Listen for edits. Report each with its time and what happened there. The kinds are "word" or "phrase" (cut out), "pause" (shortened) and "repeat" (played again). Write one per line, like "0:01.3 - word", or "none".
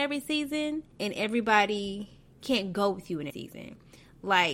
0:00.9 - pause
0:02.3 - pause
0:03.3 - word